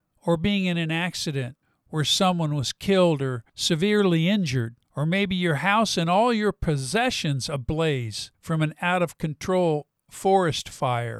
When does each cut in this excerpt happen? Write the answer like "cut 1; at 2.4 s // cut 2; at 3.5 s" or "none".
cut 1; at 1.6 s // cut 2; at 3.5 s // cut 3; at 4.8 s // cut 4; at 8.3 s